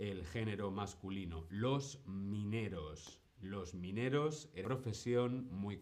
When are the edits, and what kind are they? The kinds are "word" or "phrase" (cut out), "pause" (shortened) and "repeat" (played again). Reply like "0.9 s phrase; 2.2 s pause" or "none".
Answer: 4.6 s word